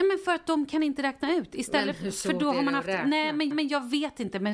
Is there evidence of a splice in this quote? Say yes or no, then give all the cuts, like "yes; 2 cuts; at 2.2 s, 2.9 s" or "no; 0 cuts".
yes; 1 cut; at 3.5 s